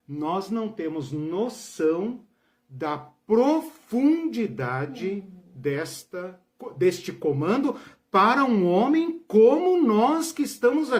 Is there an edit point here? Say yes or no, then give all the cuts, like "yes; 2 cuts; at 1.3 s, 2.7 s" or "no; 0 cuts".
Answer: no; 0 cuts